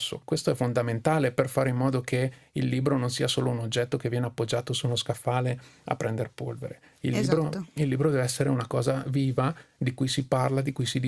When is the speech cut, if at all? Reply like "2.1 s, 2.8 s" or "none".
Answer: none